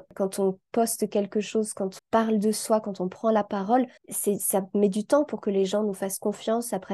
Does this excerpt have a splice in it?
yes; 2 cuts; at 2.0 s, 4.0 s

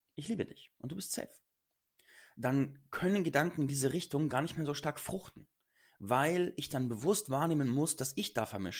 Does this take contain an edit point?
no; 0 cuts

